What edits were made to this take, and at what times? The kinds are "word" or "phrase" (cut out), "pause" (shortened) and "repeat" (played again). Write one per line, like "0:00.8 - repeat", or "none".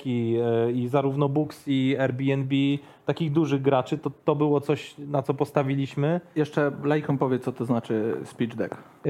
none